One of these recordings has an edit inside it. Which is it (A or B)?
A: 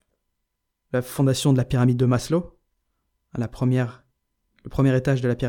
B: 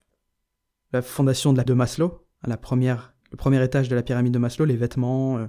B